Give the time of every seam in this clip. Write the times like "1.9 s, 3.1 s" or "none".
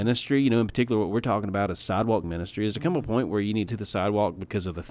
2.2 s, 3.7 s